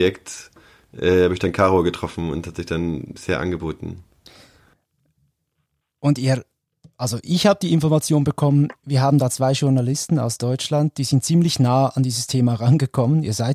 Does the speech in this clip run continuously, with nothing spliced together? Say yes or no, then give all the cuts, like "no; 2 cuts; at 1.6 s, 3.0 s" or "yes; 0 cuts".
yes; 0 cuts